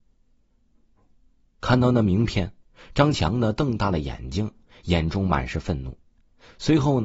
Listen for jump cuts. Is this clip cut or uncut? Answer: uncut